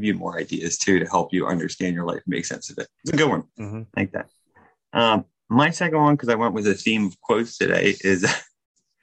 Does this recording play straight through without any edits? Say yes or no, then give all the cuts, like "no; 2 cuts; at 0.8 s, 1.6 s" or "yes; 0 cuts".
yes; 0 cuts